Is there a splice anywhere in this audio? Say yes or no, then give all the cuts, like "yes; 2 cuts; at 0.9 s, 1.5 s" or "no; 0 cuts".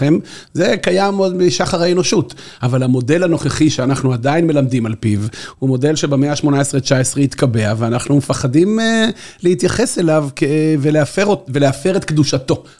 no; 0 cuts